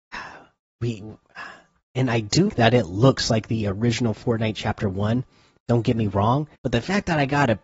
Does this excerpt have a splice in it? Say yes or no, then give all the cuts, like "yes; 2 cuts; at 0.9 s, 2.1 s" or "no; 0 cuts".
yes; 2 cuts; at 2.5 s, 6.5 s